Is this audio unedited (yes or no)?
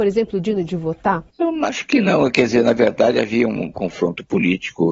no